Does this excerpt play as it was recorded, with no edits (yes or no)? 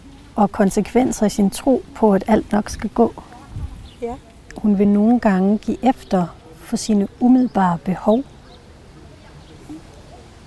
yes